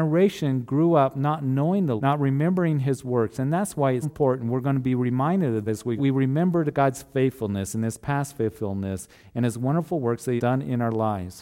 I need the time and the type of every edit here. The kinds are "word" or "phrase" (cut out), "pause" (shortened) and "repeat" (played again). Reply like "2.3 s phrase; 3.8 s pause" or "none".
2.0 s word; 4.0 s word; 5.7 s word; 6.0 s phrase; 10.4 s word